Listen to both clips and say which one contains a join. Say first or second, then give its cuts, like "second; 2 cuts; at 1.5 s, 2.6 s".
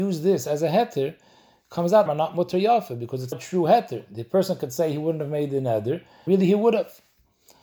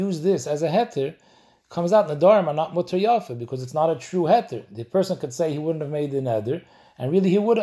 first; 3 cuts; at 2.1 s, 3.3 s, 6.3 s